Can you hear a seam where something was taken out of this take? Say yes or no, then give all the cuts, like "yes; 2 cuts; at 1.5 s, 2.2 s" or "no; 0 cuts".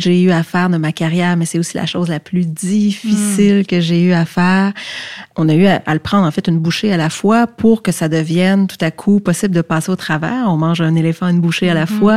no; 0 cuts